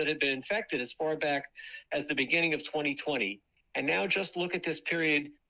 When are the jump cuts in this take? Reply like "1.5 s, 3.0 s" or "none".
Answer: none

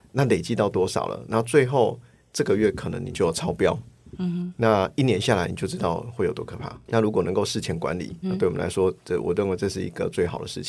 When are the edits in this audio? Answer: 8.2 s

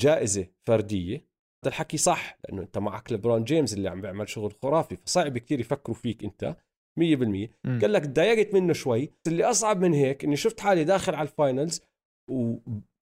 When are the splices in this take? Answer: 1.6 s, 9.3 s

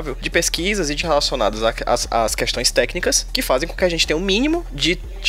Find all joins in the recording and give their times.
1.0 s

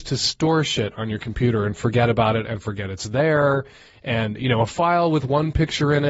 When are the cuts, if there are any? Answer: none

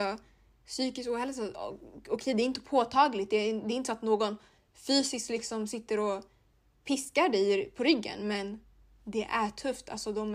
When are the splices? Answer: none

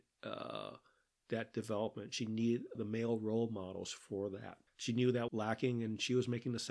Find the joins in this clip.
2.7 s, 4.7 s, 5.3 s

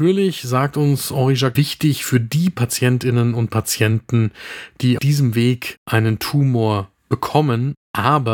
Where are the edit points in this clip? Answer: 1.5 s, 5.0 s

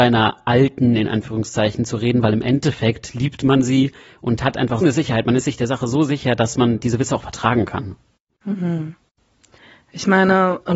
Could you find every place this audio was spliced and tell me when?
4.8 s

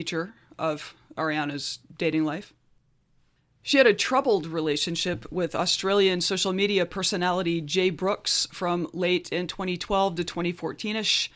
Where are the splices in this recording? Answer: none

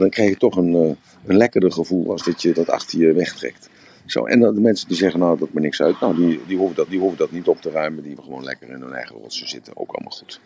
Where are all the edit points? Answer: 5.5 s, 6.9 s, 8.2 s

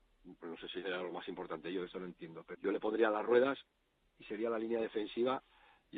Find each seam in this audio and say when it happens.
2.5 s

